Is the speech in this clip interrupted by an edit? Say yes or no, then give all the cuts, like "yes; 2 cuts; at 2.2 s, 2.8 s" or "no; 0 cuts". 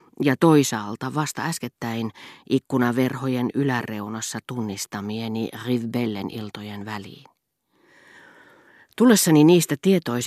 no; 0 cuts